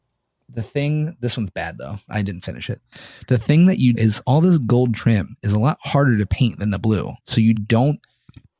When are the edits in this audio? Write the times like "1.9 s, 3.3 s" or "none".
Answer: 3.9 s, 7.2 s, 7.6 s